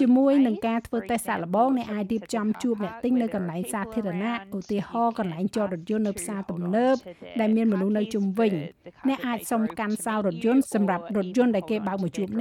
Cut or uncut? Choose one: uncut